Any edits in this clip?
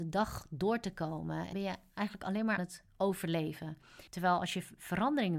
yes; 3 cuts; at 1.5 s, 2.6 s, 4.1 s

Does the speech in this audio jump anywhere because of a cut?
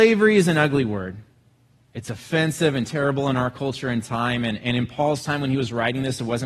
no; 0 cuts

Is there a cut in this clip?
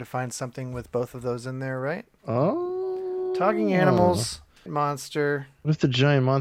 yes; 2 cuts; at 2.1 s, 4.7 s

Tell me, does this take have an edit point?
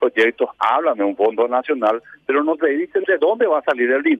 no; 0 cuts

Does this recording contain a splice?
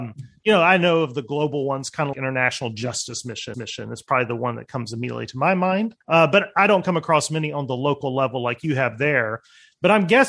yes; 3 cuts; at 2.1 s, 3.5 s, 6.0 s

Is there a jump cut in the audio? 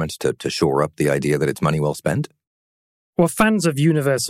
no; 0 cuts

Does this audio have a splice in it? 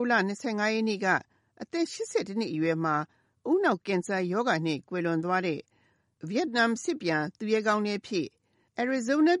no; 0 cuts

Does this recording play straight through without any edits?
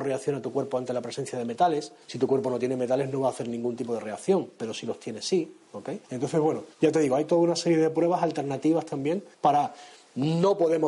no; 4 cuts; at 2.0 s, 6.0 s, 6.7 s, 9.3 s

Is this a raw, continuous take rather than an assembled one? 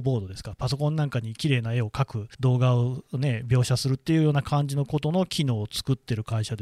no; 1 cut; at 2.3 s

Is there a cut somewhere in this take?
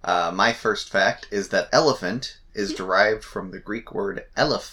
yes; 1 cut; at 1.7 s

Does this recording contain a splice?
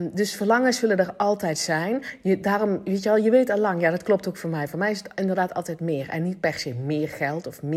no; 0 cuts

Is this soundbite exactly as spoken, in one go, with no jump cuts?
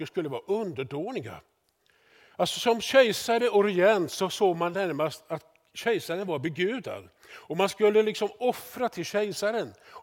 yes; 0 cuts

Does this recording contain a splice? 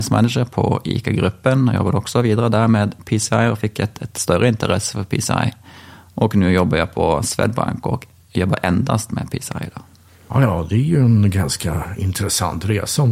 no; 0 cuts

